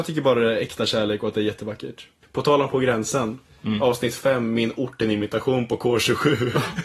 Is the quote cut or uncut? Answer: uncut